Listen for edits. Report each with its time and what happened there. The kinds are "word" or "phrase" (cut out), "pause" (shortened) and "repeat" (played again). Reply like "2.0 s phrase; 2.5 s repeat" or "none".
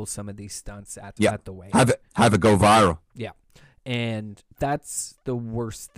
1.2 s word; 2.1 s pause; 4.5 s pause